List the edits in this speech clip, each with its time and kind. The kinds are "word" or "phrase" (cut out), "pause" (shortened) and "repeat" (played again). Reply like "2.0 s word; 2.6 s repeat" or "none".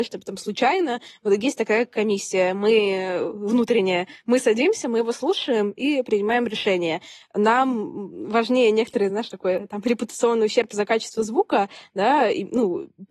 none